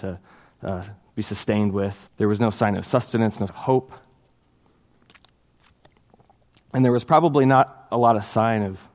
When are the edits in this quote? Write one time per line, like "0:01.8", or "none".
0:02.1
0:03.5